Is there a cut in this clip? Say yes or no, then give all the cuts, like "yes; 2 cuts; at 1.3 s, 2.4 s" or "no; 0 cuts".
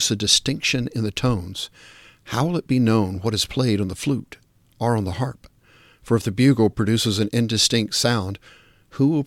no; 0 cuts